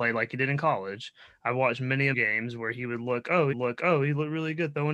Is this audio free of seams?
no; 2 cuts; at 2.1 s, 3.5 s

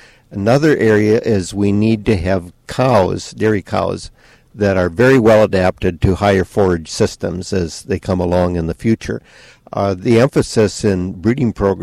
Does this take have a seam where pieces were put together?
no; 0 cuts

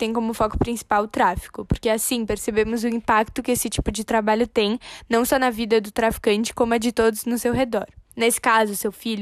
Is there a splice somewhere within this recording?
yes; 1 cut; at 8.1 s

